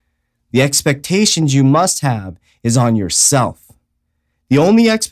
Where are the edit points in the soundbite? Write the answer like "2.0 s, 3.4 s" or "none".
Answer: none